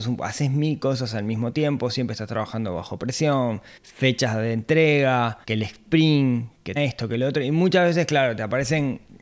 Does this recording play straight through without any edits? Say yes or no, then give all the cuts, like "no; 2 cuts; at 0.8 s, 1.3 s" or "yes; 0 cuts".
no; 3 cuts; at 3.8 s, 5.4 s, 6.8 s